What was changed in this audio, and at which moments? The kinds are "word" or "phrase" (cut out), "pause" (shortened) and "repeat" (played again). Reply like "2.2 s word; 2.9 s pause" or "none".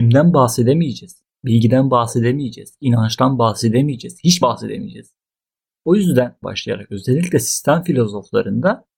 4.4 s word; 6.4 s word